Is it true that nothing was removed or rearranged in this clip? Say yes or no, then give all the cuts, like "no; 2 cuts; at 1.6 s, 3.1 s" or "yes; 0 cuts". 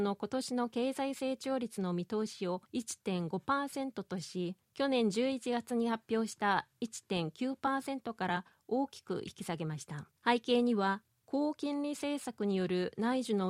no; 3 cuts; at 2.7 s, 4.6 s, 10.2 s